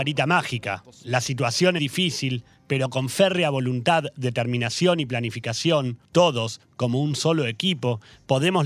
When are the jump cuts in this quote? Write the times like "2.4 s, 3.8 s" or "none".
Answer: 1.8 s, 6.0 s